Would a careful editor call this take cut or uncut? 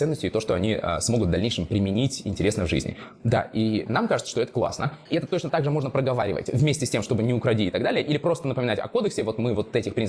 uncut